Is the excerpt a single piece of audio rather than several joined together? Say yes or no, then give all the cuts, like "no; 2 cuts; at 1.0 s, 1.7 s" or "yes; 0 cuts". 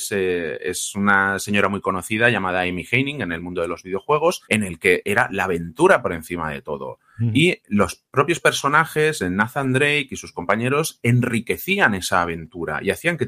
no; 1 cut; at 4.4 s